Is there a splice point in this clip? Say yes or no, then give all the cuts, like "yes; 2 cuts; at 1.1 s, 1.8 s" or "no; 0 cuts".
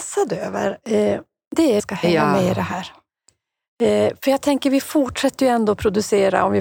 yes; 1 cut; at 1.8 s